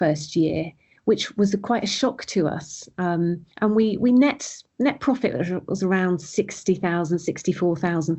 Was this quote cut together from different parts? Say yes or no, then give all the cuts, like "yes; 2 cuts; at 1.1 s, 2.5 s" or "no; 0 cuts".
yes; 1 cut; at 3.5 s